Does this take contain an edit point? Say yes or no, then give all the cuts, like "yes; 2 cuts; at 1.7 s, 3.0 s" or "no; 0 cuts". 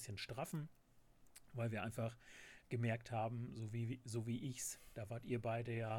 no; 0 cuts